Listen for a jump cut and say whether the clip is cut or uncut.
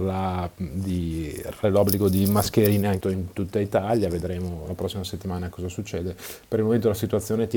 cut